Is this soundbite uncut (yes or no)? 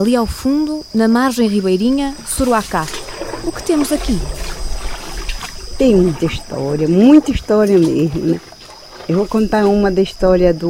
yes